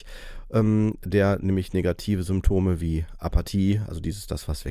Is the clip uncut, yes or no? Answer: yes